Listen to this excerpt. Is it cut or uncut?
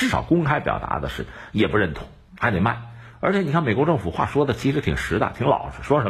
uncut